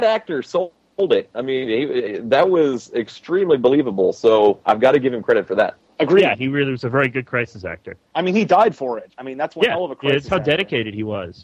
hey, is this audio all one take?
no; 1 cut; at 5.9 s

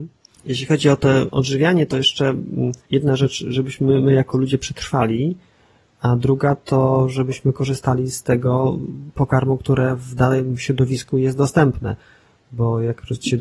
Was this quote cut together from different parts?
yes; 1 cut; at 2.8 s

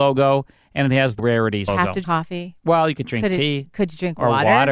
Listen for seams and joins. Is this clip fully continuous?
no; 3 cuts; at 1.2 s, 1.7 s, 2.0 s

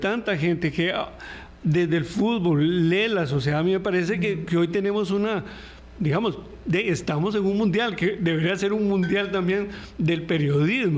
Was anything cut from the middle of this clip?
no; 0 cuts

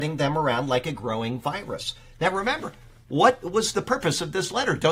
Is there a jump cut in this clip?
no; 0 cuts

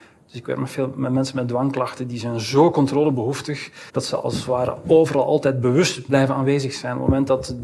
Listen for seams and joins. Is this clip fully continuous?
no; 2 cuts; at 3.9 s, 6.1 s

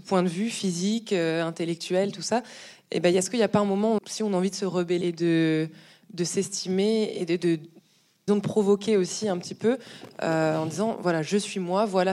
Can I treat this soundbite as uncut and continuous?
no; 3 cuts; at 4.0 s, 5.0 s, 8.3 s

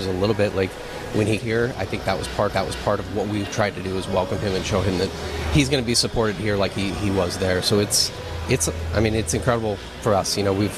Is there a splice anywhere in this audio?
yes; 2 cuts; at 1.4 s, 2.5 s

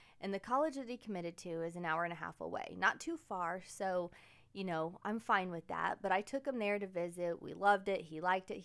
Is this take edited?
no; 0 cuts

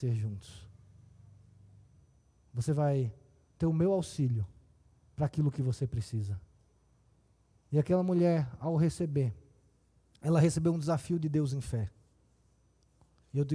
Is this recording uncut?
yes; 0 cuts

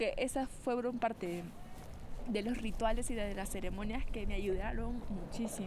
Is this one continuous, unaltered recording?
no; 1 cut; at 1.2 s

